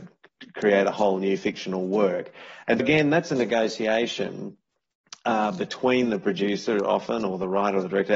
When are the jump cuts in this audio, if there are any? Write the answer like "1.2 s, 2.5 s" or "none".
2.8 s